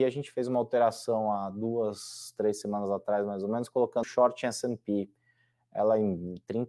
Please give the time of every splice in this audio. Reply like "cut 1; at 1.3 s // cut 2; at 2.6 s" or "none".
cut 1; at 4.0 s